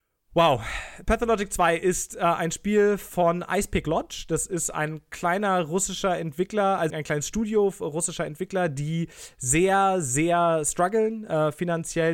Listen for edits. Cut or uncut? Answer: cut